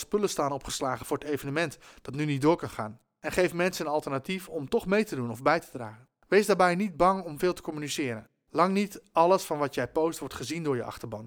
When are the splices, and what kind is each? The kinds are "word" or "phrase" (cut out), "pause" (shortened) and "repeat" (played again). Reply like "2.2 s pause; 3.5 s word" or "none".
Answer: none

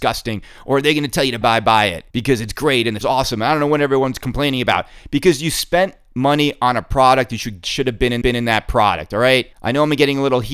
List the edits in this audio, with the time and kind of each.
1.4 s word; 2.1 s pause; 3.0 s word; 7.6 s phrase; 8.2 s repeat; 9.5 s pause

